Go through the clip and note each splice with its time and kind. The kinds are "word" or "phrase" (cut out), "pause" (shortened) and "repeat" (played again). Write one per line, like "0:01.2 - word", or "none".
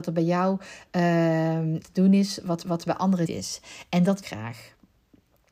0:01.8 - word
0:02.6 - repeat
0:03.2 - word
0:04.2 - phrase